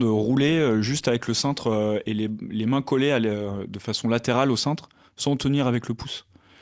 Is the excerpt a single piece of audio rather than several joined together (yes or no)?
yes